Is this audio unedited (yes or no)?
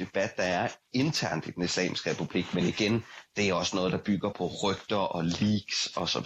no